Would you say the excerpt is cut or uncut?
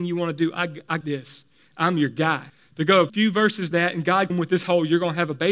cut